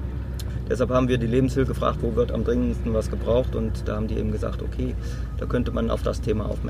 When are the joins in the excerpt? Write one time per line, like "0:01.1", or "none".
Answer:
0:01.7